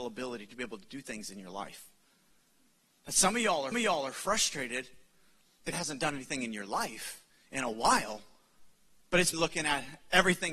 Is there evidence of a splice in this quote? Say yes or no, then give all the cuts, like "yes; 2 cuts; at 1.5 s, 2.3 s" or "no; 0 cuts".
yes; 4 cuts; at 3.7 s, 5.7 s, 7.3 s, 9.3 s